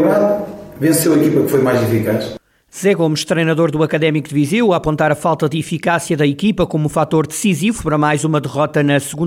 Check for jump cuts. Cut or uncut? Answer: uncut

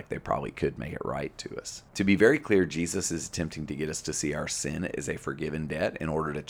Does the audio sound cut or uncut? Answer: cut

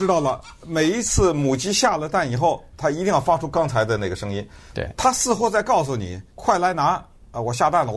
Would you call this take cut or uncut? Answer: cut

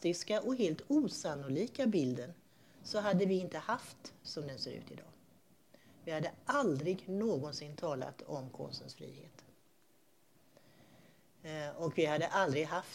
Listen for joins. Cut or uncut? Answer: cut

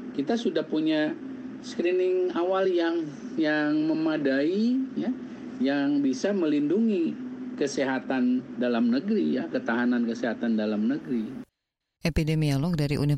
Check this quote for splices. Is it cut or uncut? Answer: uncut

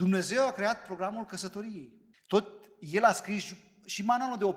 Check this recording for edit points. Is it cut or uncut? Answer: cut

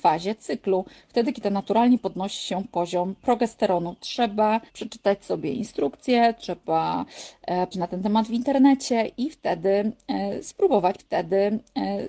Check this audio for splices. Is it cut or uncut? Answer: cut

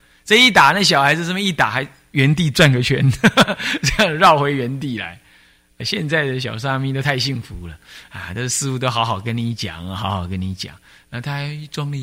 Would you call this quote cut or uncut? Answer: cut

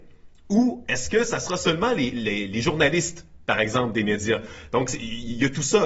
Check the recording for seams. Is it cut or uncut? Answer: uncut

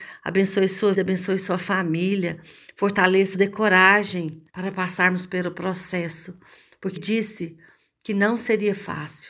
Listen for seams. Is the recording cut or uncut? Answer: cut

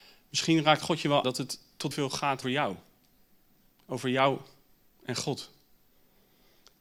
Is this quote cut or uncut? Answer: cut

